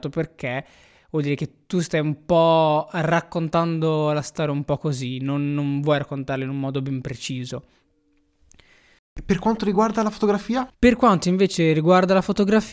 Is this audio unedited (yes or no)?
yes